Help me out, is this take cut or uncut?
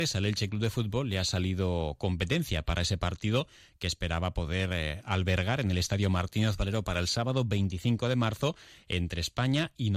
uncut